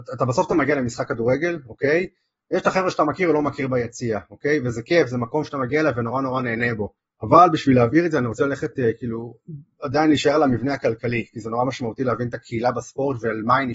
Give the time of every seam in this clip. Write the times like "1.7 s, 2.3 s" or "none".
7.0 s